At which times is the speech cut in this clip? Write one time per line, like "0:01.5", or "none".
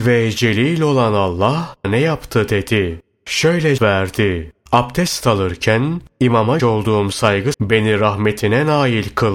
0:01.8
0:03.8
0:06.6
0:07.5